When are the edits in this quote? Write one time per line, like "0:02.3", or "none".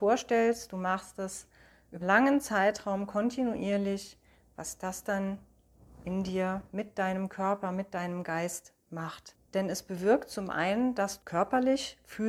0:02.0
0:09.4
0:11.2